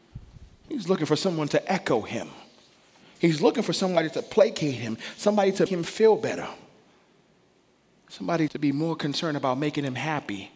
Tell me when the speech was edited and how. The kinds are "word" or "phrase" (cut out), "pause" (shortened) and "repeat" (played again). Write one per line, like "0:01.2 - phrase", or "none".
0:05.7 - word
0:08.5 - word